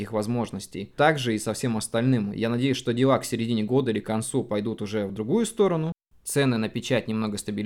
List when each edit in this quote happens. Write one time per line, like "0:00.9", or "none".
none